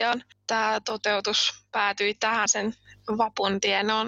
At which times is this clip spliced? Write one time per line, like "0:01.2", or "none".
0:02.5